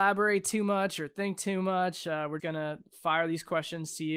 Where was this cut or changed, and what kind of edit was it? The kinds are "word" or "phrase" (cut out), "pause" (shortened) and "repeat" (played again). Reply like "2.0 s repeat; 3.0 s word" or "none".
2.4 s word